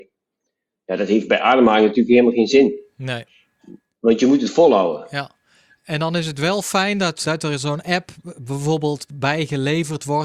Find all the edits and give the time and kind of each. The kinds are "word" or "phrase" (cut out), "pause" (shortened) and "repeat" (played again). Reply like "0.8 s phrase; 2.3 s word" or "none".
7.2 s word